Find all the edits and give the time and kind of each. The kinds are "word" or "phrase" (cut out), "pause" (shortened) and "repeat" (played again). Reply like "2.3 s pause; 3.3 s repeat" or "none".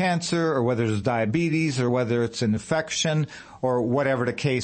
none

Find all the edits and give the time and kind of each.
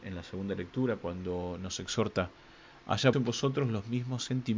3.1 s word

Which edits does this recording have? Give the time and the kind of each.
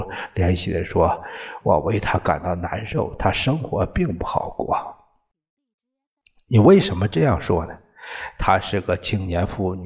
none

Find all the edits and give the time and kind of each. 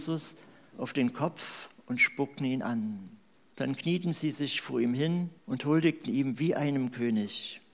3.3 s pause; 5.4 s pause

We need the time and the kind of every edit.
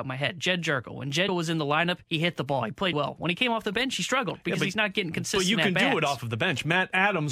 1.3 s word; 2.0 s pause; 2.9 s word

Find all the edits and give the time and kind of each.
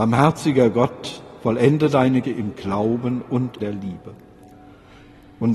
2.2 s word; 3.6 s word

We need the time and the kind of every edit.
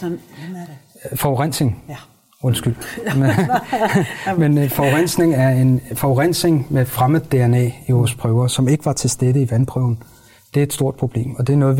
none

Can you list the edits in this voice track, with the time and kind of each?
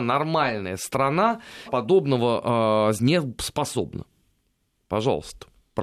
1.7 s word; 3.0 s word

